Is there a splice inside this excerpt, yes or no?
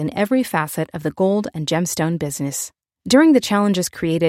no